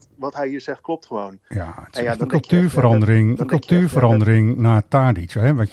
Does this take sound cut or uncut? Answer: cut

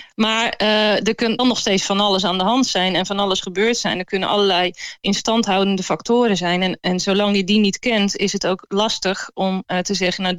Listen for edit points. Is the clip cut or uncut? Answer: cut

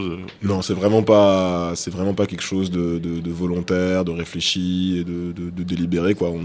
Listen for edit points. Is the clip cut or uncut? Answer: uncut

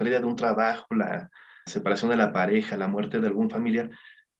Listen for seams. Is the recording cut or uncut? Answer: cut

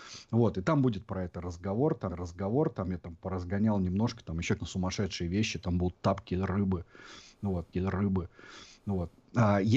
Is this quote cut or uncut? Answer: cut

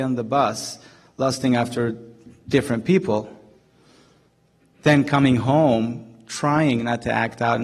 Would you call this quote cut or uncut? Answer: uncut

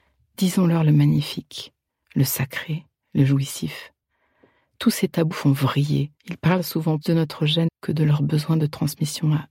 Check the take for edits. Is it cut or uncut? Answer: cut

